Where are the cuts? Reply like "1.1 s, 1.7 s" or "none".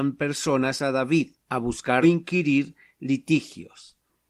2.0 s